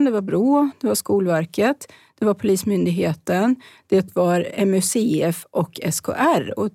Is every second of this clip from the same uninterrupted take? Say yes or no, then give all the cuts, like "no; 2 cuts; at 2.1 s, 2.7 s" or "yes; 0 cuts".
yes; 0 cuts